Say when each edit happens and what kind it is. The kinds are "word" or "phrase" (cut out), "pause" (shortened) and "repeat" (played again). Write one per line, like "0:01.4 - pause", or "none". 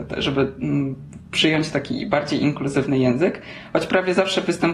none